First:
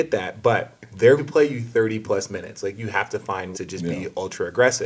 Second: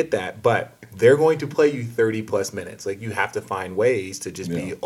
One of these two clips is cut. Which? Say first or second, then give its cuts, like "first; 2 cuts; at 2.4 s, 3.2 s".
first; 2 cuts; at 1.2 s, 3.5 s